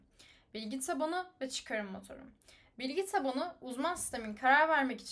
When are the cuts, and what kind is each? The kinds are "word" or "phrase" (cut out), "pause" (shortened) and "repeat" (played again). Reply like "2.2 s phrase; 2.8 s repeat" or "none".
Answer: none